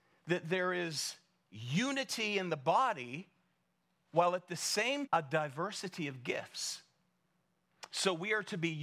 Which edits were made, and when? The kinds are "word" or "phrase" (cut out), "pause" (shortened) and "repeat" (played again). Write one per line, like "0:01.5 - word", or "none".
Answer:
0:05.1 - word